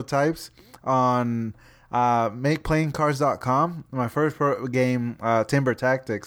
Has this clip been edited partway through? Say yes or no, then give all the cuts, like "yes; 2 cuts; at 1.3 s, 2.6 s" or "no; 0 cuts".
no; 0 cuts